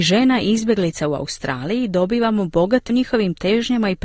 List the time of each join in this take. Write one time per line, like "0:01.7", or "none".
0:02.9